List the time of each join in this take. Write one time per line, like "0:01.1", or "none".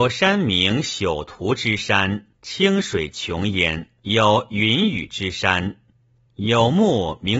0:02.3
0:04.0